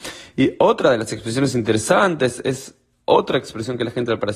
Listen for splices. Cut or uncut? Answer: uncut